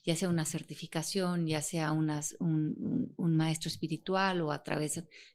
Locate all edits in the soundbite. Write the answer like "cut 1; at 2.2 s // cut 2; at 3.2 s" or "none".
none

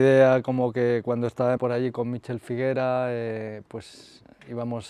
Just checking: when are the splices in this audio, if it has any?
cut 1; at 1.6 s

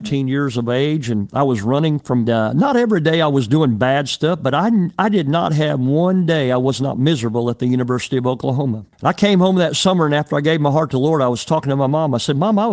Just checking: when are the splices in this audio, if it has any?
cut 1; at 2.3 s // cut 2; at 8.9 s

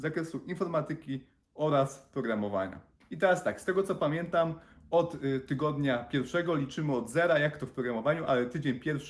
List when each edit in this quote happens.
none

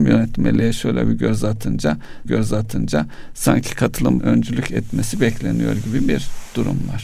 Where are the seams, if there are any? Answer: cut 1; at 2.3 s // cut 2; at 4.2 s

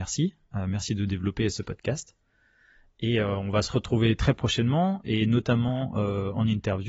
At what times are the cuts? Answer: none

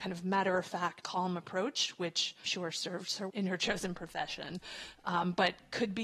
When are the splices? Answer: cut 1; at 1.0 s // cut 2; at 2.4 s // cut 3; at 3.3 s

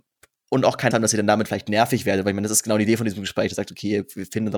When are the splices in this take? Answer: cut 1; at 0.9 s

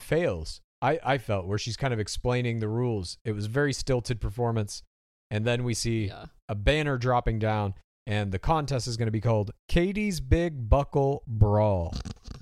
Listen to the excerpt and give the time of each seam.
none

